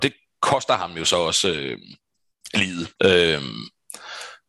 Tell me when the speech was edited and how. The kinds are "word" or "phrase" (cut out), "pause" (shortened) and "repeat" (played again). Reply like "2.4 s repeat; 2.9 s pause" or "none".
3.0 s pause